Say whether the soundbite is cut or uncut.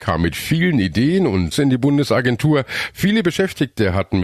cut